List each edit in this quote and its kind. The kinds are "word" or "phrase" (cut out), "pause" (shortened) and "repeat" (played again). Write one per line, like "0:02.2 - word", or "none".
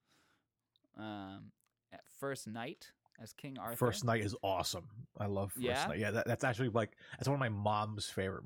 none